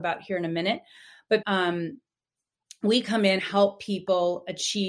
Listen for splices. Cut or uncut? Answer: cut